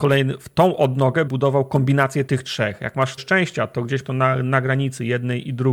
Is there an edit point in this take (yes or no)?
yes